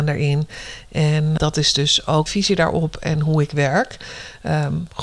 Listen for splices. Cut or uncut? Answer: cut